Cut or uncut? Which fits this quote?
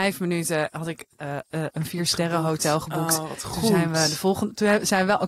uncut